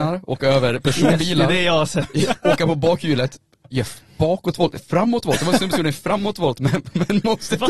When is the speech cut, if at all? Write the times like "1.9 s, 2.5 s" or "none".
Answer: none